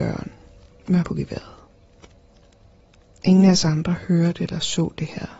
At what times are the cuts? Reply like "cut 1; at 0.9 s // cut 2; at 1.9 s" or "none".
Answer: cut 1; at 1.0 s